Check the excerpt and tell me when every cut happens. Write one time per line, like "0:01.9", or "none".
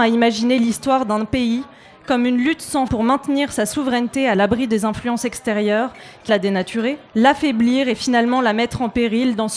0:02.9
0:06.3
0:07.1